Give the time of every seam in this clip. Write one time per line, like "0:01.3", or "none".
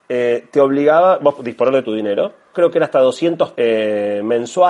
0:01.4
0:01.8
0:02.5
0:03.5

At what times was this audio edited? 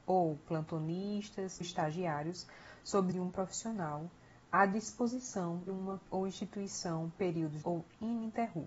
0:01.6
0:03.1
0:05.7
0:06.1
0:07.1
0:07.6

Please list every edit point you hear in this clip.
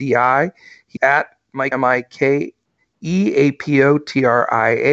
0:01.0
0:01.7

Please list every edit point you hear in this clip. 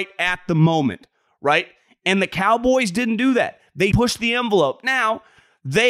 0:03.9

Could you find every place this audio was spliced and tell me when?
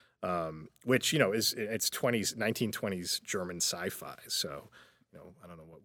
none

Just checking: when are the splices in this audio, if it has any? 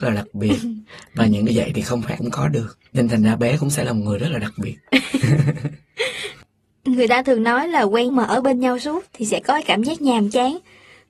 0:01.5
0:02.2
0:02.9
0:08.1
0:09.1

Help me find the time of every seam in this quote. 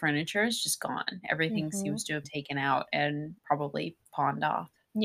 0:02.2
0:03.4

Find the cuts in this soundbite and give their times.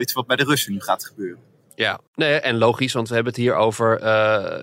0:02.1

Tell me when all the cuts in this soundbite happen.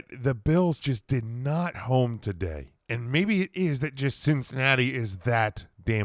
0:01.7
0:02.8

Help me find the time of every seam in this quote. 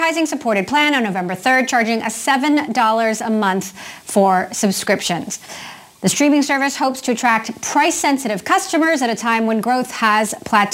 none

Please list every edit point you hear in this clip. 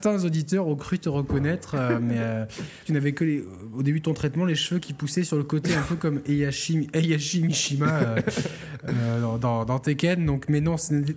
0:02.9

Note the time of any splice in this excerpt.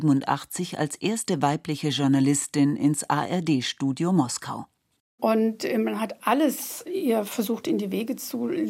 none

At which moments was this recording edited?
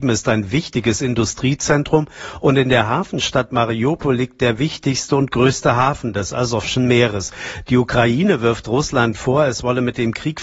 none

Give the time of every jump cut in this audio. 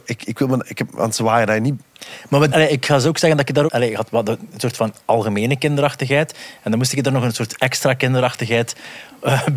0:02.5
0:03.7

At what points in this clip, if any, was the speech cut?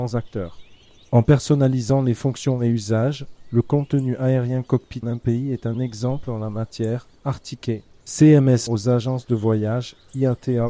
0:05.0
0:08.7

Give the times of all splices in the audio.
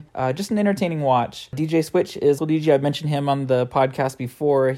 0:02.4

